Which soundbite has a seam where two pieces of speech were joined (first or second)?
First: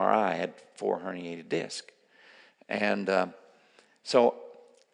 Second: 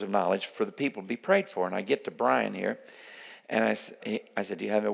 second